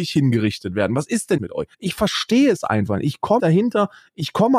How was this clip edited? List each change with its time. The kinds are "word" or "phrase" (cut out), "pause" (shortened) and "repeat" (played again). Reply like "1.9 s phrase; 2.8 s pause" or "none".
1.4 s word; 1.7 s pause; 3.4 s word

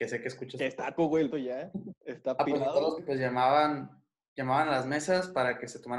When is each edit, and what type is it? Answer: 1.0 s phrase; 1.3 s word; 2.0 s pause; 3.0 s word

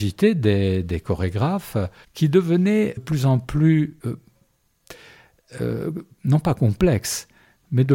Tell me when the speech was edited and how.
2.0 s pause; 3.0 s phrase; 4.0 s pause

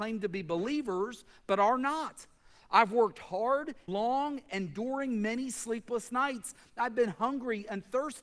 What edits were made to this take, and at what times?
3.9 s word

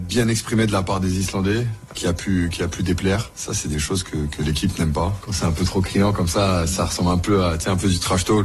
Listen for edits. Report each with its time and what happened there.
1.9 s word

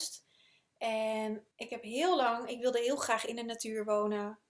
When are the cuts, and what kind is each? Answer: 1.5 s pause

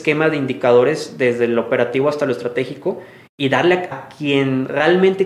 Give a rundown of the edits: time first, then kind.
3.9 s word

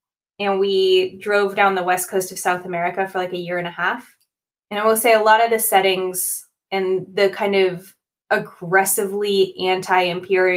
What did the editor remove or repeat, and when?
none

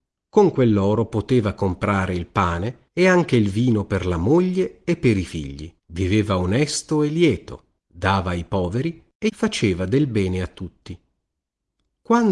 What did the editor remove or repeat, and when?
2.9 s pause; 5.8 s pause; 7.8 s pause

